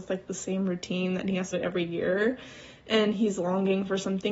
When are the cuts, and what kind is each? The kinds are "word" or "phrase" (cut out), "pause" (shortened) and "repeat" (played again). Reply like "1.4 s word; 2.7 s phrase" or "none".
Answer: 1.5 s phrase